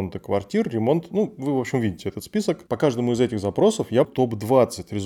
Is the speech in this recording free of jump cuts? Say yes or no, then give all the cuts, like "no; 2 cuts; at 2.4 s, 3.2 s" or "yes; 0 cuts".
no; 1 cut; at 4.0 s